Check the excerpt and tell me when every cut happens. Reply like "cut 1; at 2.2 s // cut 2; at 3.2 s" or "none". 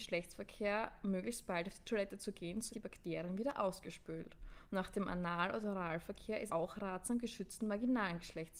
cut 1; at 2.7 s // cut 2; at 6.5 s